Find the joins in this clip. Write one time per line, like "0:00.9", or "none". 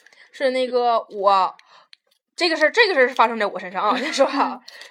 none